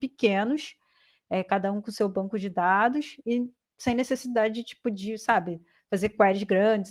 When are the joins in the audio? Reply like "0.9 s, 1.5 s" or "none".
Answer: none